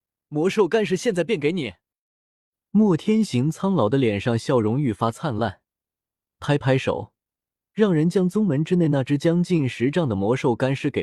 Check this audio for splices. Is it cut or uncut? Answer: uncut